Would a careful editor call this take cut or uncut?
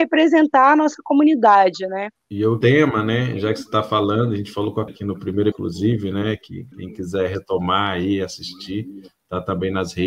cut